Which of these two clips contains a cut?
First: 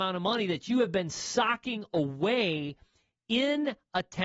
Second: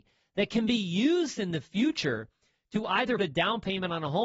second; 1 cut; at 3.2 s

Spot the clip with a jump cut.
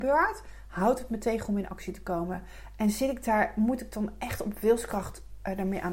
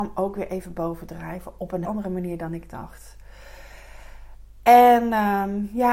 second; 1 cut; at 1.8 s

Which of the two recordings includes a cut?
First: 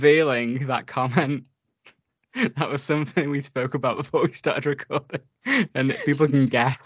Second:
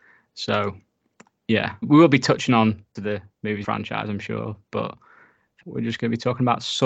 second; 4 cuts; at 1.8 s, 3.0 s, 3.6 s, 5.6 s

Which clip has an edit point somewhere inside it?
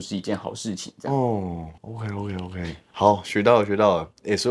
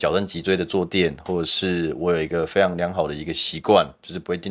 first; 1 cut; at 1.8 s

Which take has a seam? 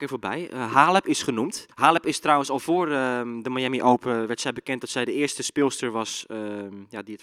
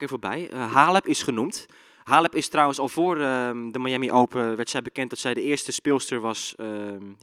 first; 1 cut; at 1.7 s

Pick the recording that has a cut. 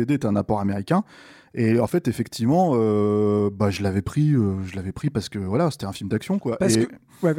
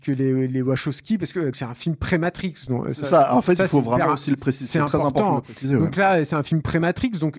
second; 1 cut; at 1.5 s

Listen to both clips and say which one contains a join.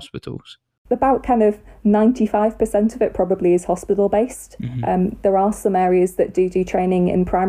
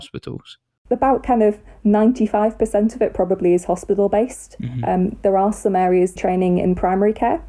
second; 1 cut; at 6.2 s

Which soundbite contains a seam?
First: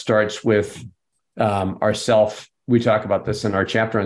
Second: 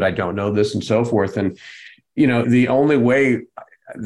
second; 1 cut; at 2.4 s

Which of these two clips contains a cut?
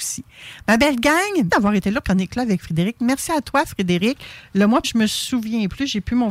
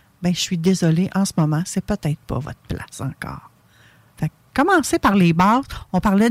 first; 3 cuts; at 1.5 s, 2.0 s, 4.8 s

